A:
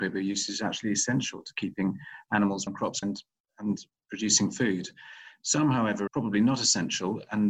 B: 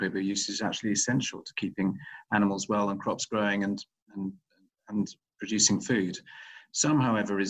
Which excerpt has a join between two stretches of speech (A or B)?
A